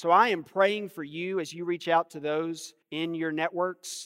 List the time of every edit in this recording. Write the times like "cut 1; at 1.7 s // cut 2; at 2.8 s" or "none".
cut 1; at 2.8 s